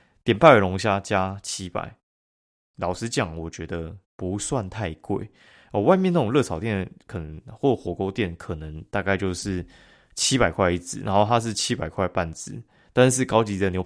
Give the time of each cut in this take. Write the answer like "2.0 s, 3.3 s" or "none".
4.1 s